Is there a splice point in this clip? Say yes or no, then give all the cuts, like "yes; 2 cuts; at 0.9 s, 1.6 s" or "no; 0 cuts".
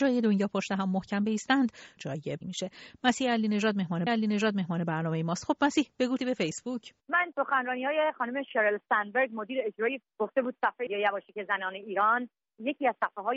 yes; 7 cuts; at 2.0 s, 2.4 s, 4.1 s, 6.2 s, 7.3 s, 10.0 s, 10.9 s